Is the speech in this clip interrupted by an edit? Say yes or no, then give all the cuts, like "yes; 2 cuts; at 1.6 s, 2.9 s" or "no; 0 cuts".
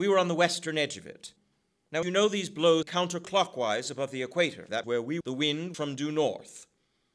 yes; 5 cuts; at 2.0 s, 2.8 s, 4.8 s, 5.2 s, 5.7 s